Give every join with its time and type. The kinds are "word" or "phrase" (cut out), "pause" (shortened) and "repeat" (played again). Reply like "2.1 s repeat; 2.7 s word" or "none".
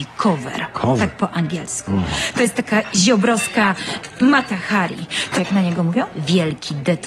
5.4 s phrase